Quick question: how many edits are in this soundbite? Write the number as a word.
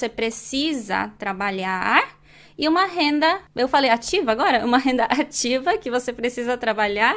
zero